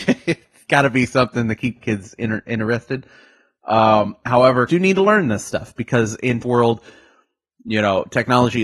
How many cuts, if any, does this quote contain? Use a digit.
2